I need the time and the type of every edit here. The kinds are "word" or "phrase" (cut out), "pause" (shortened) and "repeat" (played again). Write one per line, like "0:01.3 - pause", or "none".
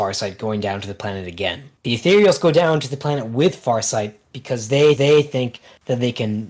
0:01.8 - pause
0:05.0 - repeat